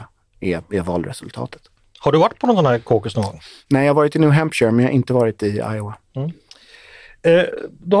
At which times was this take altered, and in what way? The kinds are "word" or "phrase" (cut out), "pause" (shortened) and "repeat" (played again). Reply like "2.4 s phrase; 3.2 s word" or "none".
none